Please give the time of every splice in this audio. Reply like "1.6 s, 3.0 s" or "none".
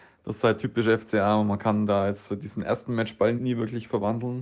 3.4 s